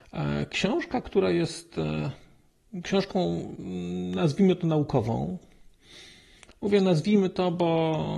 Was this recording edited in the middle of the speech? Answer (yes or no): no